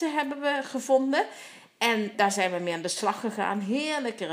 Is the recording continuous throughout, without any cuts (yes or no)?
no